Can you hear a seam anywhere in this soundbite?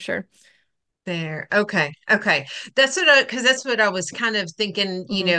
no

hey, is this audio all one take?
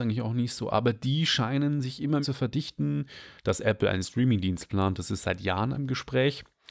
no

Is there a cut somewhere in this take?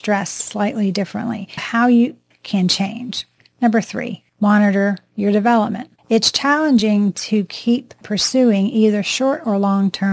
yes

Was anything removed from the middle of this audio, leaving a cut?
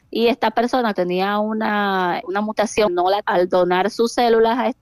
yes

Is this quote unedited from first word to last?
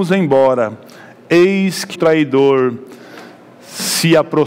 no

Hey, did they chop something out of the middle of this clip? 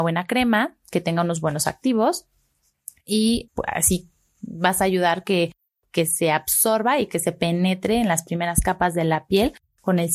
no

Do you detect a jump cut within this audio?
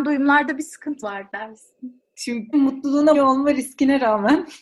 yes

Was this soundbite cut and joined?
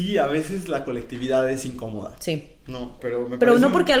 yes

